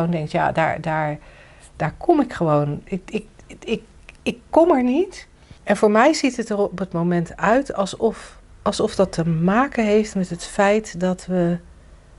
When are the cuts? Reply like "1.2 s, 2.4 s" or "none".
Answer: 4.2 s, 5.6 s, 8.4 s